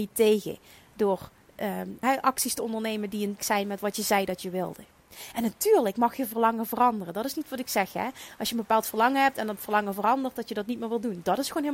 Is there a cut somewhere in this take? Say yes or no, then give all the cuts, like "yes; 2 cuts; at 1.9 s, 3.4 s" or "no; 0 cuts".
yes; 2 cuts; at 2.0 s, 3.4 s